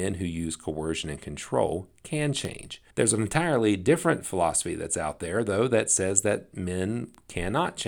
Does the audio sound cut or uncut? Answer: cut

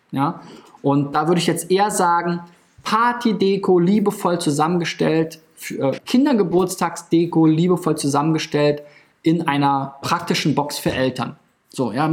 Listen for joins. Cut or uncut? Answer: cut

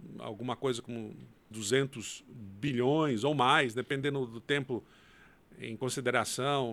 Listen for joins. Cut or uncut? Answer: cut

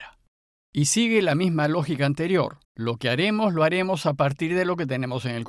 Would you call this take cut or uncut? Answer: cut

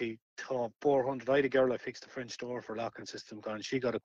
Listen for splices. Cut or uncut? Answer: uncut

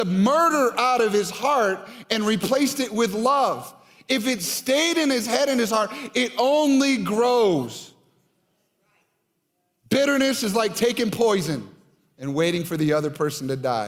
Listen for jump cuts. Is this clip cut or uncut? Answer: uncut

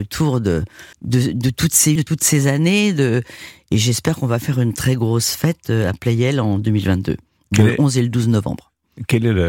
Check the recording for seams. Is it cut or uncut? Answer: cut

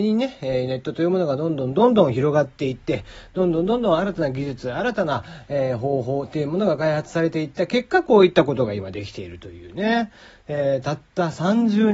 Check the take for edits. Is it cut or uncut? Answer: uncut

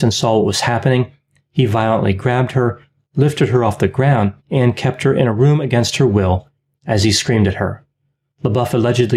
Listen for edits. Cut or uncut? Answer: cut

